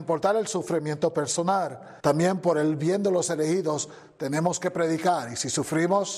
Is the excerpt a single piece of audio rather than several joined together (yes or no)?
no